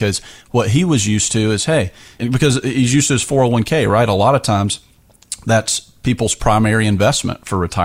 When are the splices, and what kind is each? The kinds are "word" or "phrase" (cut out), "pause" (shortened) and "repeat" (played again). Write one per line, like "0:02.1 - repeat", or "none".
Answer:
none